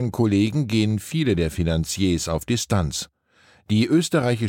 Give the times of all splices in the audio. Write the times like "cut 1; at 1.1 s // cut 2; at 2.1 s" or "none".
none